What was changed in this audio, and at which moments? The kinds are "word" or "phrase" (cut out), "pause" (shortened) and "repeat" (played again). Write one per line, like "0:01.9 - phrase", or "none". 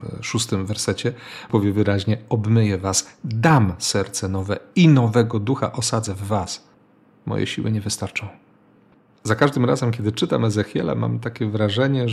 0:01.5 - word